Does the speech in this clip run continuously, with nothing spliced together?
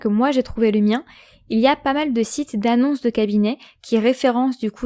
yes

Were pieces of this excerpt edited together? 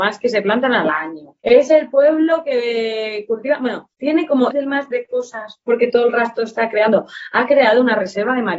yes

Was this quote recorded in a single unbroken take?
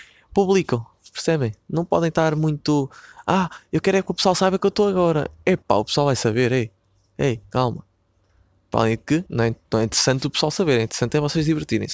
no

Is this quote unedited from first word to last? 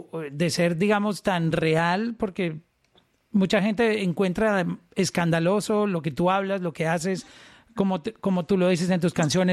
yes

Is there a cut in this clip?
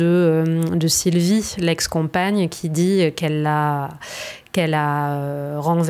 no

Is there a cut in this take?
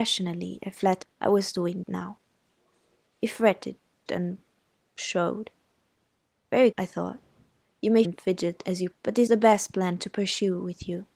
yes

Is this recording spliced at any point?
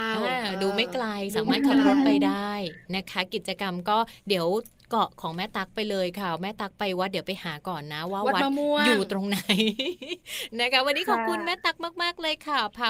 no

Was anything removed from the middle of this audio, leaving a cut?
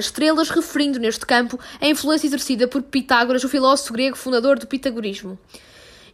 no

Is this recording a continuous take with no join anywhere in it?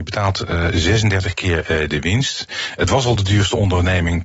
yes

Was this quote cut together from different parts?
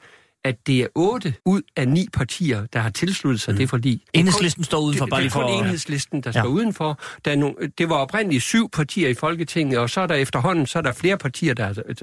yes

